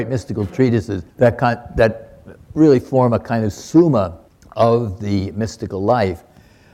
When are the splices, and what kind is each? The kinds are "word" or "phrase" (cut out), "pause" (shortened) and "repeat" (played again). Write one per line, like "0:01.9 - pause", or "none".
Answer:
0:01.1 - pause
0:04.3 - pause